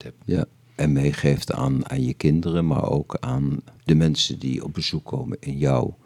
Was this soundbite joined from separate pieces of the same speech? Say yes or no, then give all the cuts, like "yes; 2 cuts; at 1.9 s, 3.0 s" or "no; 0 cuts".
yes; 1 cut; at 3.8 s